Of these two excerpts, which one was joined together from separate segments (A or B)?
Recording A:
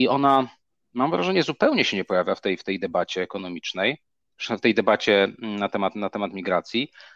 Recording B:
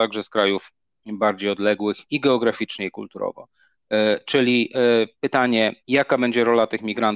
B